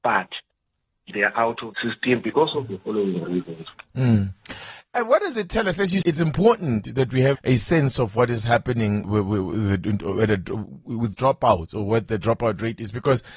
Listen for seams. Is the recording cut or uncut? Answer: cut